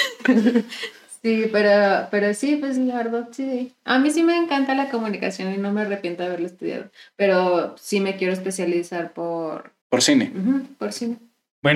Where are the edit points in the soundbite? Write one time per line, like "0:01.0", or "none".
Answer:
0:09.8